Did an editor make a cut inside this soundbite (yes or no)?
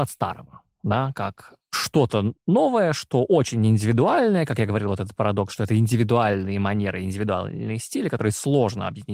no